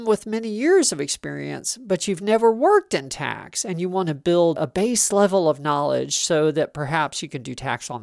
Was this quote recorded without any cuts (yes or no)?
no